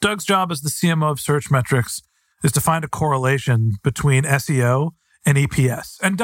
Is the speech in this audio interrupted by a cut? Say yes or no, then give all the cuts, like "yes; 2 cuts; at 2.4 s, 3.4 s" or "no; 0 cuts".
no; 0 cuts